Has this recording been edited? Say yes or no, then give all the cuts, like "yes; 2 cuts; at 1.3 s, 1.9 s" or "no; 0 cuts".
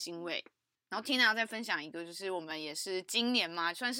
no; 0 cuts